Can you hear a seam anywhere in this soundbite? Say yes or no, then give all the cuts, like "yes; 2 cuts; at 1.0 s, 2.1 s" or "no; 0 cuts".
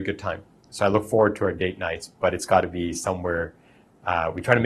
no; 0 cuts